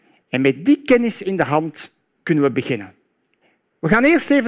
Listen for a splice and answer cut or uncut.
uncut